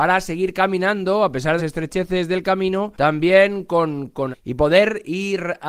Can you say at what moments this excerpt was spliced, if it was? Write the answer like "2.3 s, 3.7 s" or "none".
1.6 s, 2.9 s, 4.3 s